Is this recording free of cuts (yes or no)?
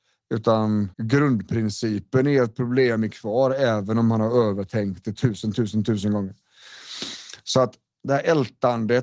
no